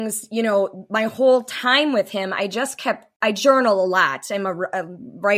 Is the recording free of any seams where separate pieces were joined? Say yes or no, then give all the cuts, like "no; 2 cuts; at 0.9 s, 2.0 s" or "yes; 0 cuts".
no; 1 cut; at 3.2 s